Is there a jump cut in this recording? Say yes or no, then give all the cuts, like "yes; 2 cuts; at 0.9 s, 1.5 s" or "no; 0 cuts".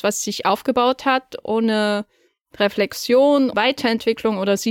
yes; 1 cut; at 3.5 s